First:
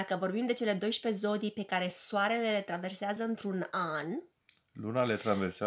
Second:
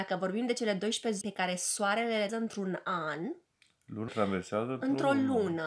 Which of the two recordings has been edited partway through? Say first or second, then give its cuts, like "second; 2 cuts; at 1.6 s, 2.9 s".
second; 3 cuts; at 1.2 s, 2.3 s, 4.1 s